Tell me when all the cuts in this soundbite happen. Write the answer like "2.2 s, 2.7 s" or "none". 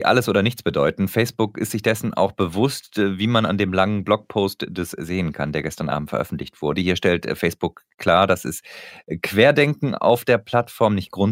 4.9 s